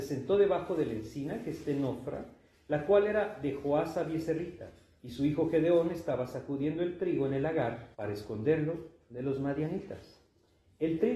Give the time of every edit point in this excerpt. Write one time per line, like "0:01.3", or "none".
0:07.9